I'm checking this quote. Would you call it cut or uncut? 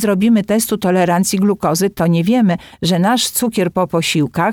uncut